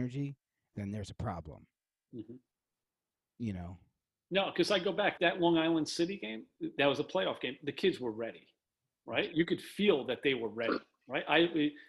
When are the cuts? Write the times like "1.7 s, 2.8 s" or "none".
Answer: 5.2 s